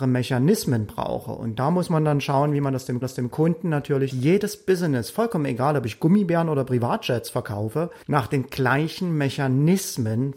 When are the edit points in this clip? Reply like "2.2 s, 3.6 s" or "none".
3.0 s, 4.1 s, 8.0 s

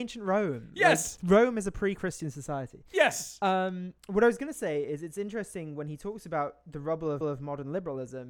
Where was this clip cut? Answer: 1.2 s, 4.0 s, 7.2 s

